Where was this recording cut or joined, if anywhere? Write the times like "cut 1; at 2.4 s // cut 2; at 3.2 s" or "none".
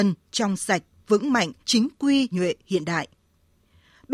cut 1; at 1.6 s // cut 2; at 2.3 s

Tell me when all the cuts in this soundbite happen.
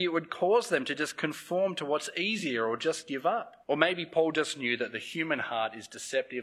cut 1; at 3.6 s

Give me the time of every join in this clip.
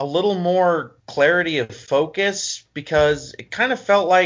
cut 1; at 1.0 s

